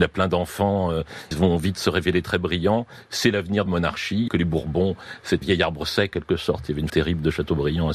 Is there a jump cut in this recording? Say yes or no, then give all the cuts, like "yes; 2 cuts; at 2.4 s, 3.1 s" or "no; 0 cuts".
yes; 6 cuts; at 1.3 s, 3.7 s, 4.3 s, 5.4 s, 6.1 s, 6.9 s